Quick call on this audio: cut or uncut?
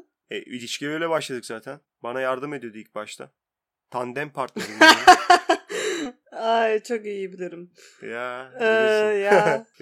uncut